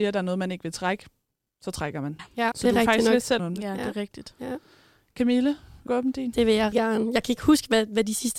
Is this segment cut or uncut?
cut